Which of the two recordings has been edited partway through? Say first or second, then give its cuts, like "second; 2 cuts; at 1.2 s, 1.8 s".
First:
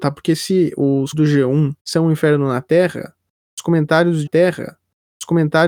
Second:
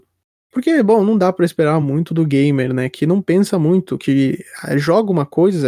first; 3 cuts; at 1.1 s, 1.8 s, 4.3 s